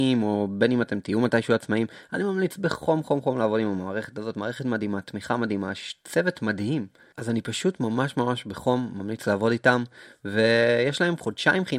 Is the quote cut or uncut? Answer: uncut